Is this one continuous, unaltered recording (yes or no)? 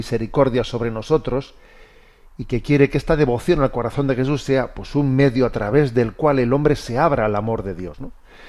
yes